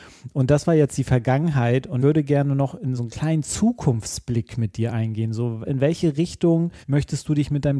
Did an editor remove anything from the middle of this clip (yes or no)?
yes